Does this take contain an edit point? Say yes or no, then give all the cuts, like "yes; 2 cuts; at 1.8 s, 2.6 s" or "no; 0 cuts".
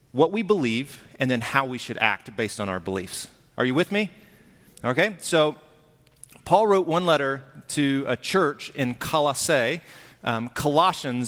no; 0 cuts